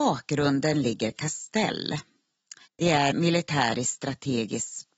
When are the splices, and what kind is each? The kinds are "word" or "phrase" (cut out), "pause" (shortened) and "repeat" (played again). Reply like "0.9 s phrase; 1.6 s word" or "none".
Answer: 2.7 s pause; 3.1 s word

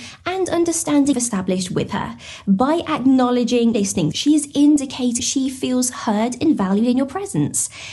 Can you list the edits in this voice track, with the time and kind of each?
1.1 s word; 3.7 s word; 4.1 s word; 5.2 s word

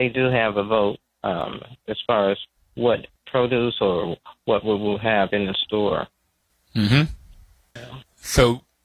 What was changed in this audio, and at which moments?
none

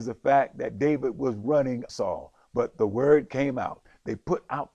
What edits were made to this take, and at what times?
1.9 s phrase

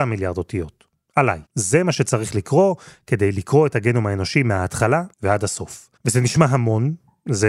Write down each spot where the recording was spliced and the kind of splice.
1.5 s pause; 5.1 s pause; 6.0 s pause

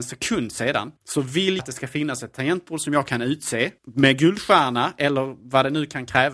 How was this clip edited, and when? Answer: 1.0 s pause; 1.6 s word; 3.8 s pause

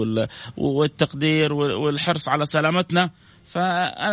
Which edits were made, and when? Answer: none

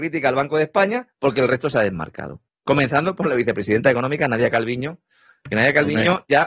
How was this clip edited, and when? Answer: 1.1 s pause; 2.5 s pause

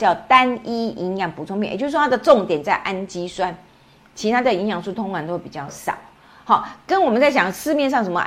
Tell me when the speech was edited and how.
none

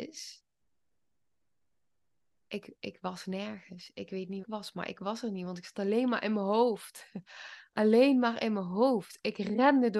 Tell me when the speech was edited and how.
4.4 s phrase

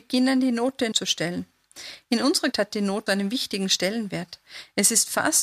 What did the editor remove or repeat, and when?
0.9 s phrase; 2.5 s word; 3.1 s word

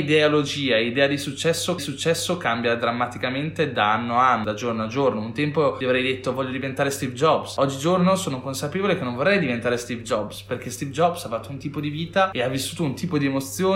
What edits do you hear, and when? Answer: 1.8 s repeat

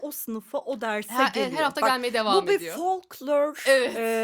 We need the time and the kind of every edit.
none

